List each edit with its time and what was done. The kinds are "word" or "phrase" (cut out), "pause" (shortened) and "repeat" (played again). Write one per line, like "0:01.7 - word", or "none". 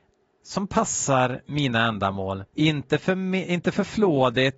0:02.5 - pause

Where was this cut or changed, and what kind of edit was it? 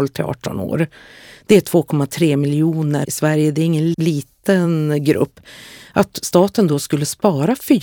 0:03.0 - word
0:03.9 - word

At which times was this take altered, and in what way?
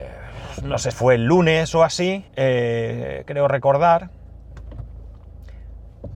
0:00.9 - word
0:02.3 - pause

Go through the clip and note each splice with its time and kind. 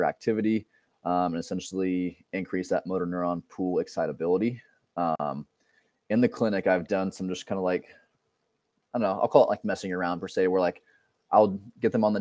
none

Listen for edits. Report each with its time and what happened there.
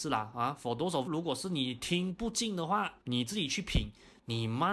0:01.1 - word
0:03.0 - pause

